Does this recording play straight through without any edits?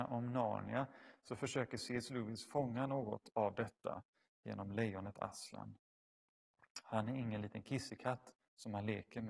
yes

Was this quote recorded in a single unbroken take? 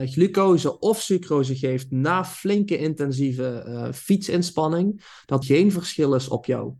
no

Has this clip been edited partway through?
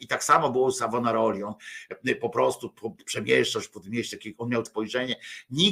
yes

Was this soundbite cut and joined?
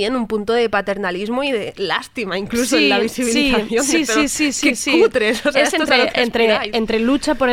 no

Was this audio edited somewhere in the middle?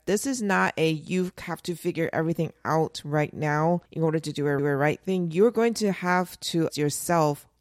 yes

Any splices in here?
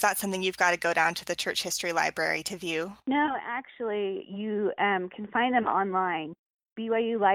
no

